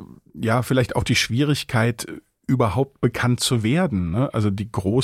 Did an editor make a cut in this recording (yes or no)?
no